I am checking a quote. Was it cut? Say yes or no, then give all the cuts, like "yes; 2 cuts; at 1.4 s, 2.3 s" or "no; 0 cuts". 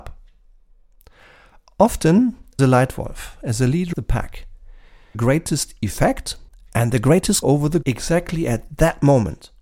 yes; 6 cuts; at 2.6 s, 3.9 s, 5.1 s, 6.5 s, 7.4 s, 7.8 s